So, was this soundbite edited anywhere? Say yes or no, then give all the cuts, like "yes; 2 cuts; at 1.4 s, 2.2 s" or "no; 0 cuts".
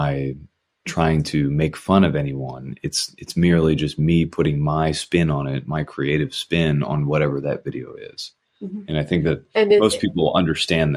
no; 0 cuts